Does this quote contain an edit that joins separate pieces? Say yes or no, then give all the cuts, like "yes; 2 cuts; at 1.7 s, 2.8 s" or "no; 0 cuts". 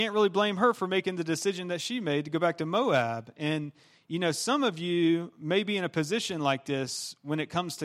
no; 0 cuts